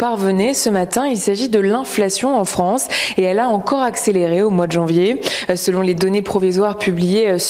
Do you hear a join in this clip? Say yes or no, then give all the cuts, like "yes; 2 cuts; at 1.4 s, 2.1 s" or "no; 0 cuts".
no; 0 cuts